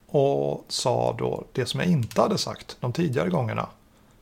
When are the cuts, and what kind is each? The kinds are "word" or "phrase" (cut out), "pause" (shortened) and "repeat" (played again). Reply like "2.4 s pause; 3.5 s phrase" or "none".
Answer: none